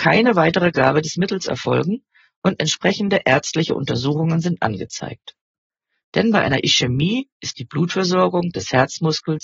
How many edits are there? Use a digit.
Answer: 0